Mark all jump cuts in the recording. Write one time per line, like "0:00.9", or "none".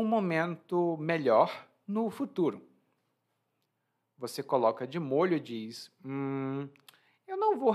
none